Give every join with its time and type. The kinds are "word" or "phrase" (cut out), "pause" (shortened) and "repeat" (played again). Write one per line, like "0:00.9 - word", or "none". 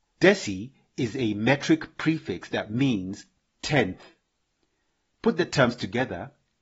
none